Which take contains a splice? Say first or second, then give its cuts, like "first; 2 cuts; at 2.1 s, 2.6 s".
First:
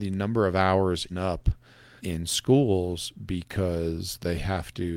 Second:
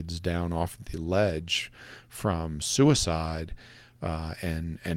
first; 2 cuts; at 1.1 s, 2.0 s